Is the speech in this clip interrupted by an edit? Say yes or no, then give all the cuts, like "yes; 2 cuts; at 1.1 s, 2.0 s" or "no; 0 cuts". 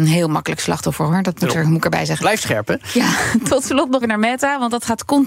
yes; 1 cut; at 4.0 s